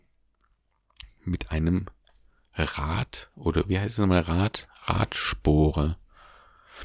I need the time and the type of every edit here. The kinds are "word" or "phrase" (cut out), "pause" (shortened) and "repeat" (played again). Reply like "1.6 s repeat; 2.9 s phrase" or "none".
none